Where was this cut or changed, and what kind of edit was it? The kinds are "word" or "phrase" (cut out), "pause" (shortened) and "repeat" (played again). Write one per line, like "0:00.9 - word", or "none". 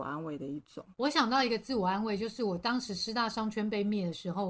0:00.9 - pause